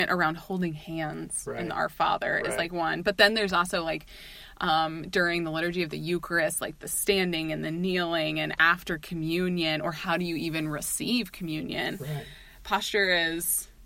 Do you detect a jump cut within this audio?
no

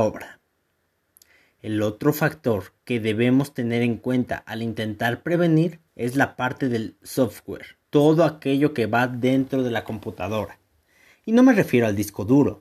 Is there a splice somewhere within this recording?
yes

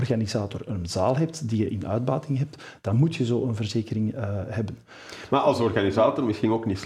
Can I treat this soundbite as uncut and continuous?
yes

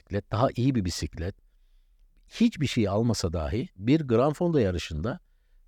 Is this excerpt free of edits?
yes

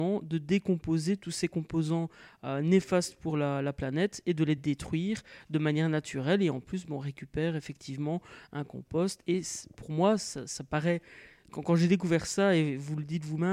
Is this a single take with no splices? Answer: yes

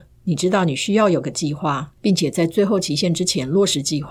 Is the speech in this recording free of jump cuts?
no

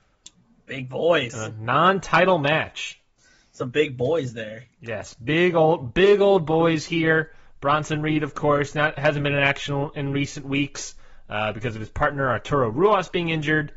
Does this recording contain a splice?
no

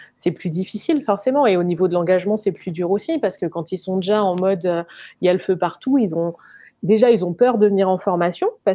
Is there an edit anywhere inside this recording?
no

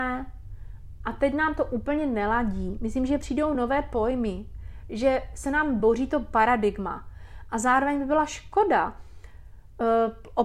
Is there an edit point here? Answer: no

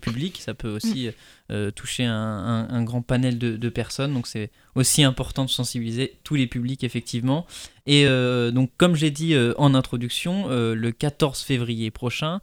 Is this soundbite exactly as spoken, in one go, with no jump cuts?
yes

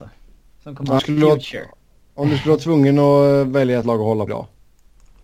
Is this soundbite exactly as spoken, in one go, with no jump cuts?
no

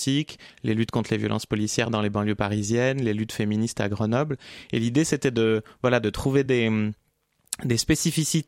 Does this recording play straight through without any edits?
yes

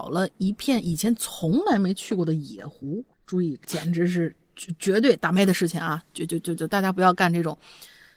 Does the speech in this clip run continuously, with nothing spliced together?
no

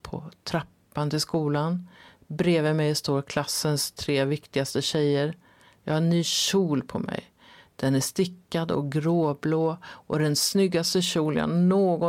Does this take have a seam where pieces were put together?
no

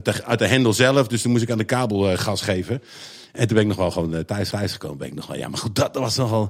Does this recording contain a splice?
yes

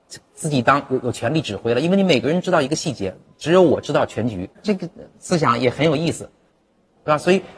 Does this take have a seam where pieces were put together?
yes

